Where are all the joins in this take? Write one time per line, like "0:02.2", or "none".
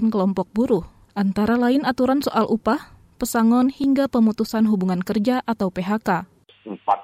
none